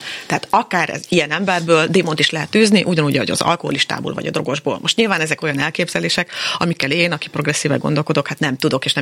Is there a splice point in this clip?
no; 0 cuts

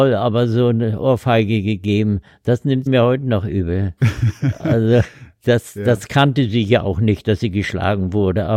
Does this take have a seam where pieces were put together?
yes; 2 cuts; at 2.9 s, 4.0 s

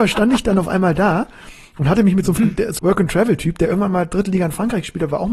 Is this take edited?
yes; 2 cuts; at 2.4 s, 2.8 s

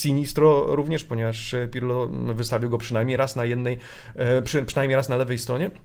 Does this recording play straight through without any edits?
yes; 0 cuts

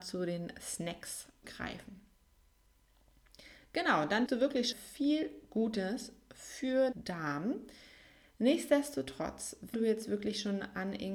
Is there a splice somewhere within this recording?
yes; 5 cuts; at 1.4 s, 4.3 s, 4.7 s, 6.9 s, 9.7 s

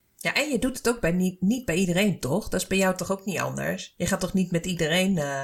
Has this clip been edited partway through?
no; 0 cuts

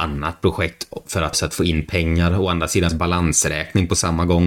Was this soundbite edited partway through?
yes; 2 cuts; at 1.3 s, 2.9 s

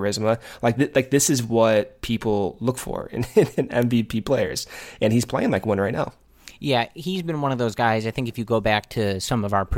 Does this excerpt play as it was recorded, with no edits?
yes; 0 cuts

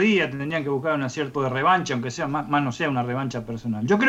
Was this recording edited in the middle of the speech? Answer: yes; 1 cut; at 1.3 s

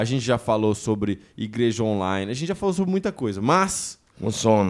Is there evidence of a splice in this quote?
no; 0 cuts

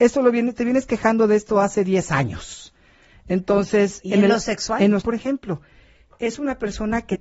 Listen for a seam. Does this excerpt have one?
yes; 2 cuts; at 4.0 s, 5.0 s

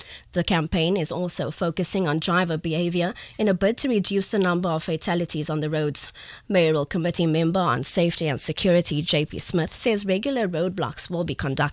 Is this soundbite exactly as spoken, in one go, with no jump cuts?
yes; 0 cuts

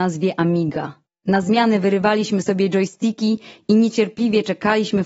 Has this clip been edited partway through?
yes; 1 cut; at 1.1 s

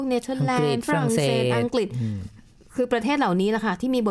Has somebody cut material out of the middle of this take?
no; 0 cuts

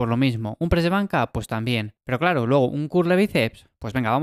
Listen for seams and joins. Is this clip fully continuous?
no; 1 cut; at 2.0 s

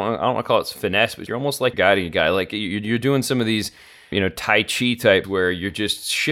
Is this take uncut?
no; 4 cuts; at 1.3 s, 1.7 s, 4.1 s, 5.2 s

